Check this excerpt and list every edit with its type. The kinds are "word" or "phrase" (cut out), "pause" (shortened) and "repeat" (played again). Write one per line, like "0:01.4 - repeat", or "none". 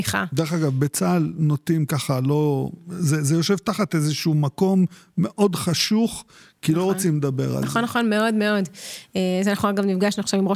none